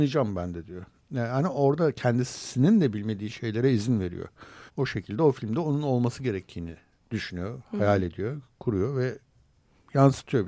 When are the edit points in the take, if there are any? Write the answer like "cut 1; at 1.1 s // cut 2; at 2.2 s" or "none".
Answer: cut 1; at 4.7 s